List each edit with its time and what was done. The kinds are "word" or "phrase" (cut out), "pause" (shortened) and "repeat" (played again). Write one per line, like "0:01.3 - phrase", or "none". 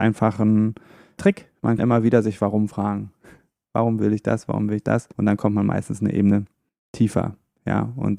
0:01.8 - word
0:05.1 - pause

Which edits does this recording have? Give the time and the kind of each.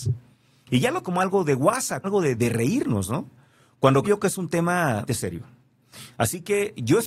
0:01.0 - word
0:02.0 - word
0:02.4 - word
0:04.0 - word
0:05.1 - word

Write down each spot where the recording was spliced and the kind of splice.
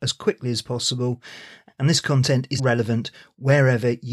0:02.6 - word

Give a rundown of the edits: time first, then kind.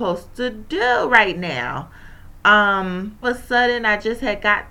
0:03.2 - phrase

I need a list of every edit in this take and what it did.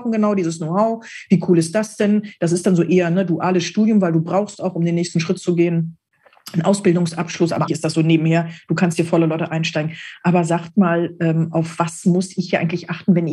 0:07.7 - word

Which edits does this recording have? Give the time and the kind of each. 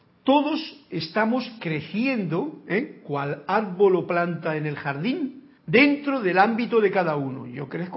0:05.6 - pause

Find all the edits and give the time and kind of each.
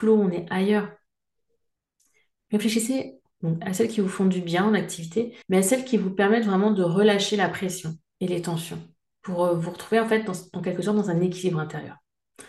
0:05.4 - pause
0:08.0 - pause

